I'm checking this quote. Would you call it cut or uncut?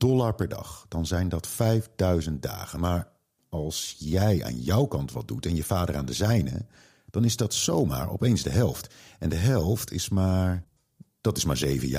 uncut